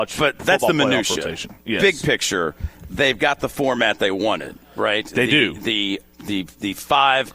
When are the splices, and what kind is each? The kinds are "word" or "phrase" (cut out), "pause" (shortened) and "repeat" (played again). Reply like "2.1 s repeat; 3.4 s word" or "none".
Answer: 6.0 s word